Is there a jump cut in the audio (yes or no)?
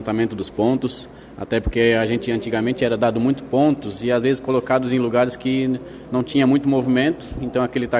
no